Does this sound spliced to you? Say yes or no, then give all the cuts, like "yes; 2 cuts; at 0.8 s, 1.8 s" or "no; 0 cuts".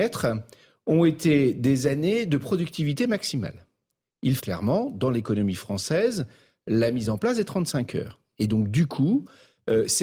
yes; 1 cut; at 4.4 s